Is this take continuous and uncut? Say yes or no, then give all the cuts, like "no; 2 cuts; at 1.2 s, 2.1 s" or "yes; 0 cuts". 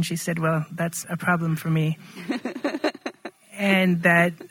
no; 1 cut; at 1.0 s